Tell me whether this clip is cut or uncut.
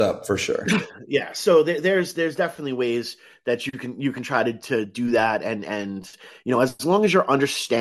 uncut